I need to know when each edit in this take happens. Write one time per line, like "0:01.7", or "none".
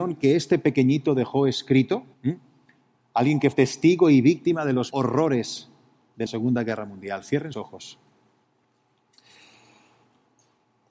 0:02.1
0:03.5
0:04.9
0:06.3
0:07.5